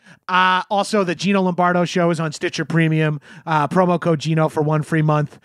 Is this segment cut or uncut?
uncut